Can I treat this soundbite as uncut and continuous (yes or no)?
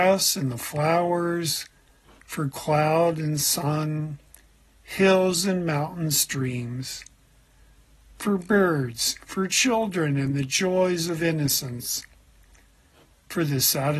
yes